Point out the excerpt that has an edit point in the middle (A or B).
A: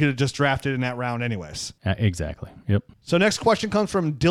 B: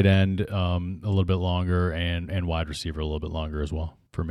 A